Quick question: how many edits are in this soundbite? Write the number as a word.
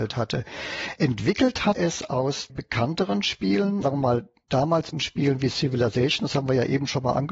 four